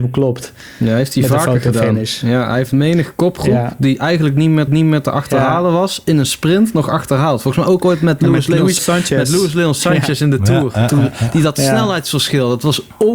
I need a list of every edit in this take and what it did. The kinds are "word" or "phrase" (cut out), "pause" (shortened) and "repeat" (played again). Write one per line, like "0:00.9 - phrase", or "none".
0:04.7 - repeat
0:08.8 - word